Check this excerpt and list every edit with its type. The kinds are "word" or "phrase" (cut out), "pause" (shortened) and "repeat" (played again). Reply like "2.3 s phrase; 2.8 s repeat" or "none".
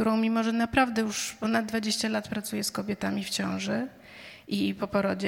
none